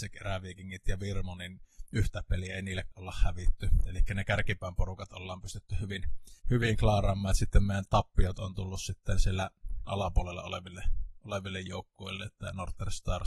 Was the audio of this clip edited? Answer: yes; 3 cuts; at 2.9 s, 6.4 s, 9.9 s

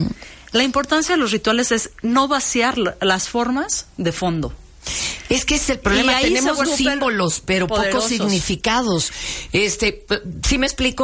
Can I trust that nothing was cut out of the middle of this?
no; 1 cut; at 6.6 s

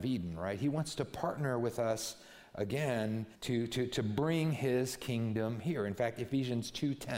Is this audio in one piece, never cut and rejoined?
no; 1 cut; at 3.3 s

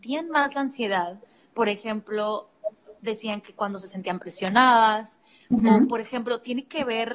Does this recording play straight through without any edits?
yes; 0 cuts

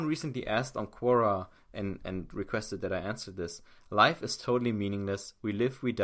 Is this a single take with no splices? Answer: yes; 0 cuts

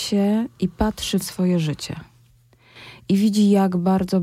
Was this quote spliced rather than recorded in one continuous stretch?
yes; 1 cut; at 1.2 s

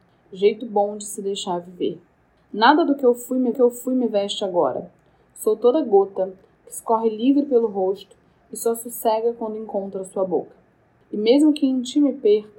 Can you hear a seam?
yes; 1 cut; at 3.5 s

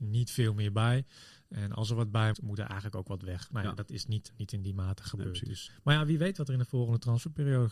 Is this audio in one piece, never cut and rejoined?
no; 3 cuts; at 2.3 s, 4.3 s, 5.7 s

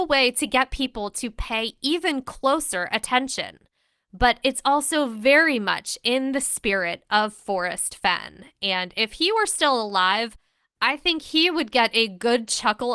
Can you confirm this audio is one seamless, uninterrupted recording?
yes; 0 cuts

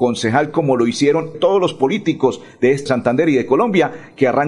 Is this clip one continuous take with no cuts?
no; 2 cuts; at 1.3 s, 2.9 s

